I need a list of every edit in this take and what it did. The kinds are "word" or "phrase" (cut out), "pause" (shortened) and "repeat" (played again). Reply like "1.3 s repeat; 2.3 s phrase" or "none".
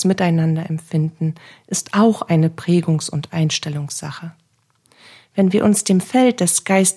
none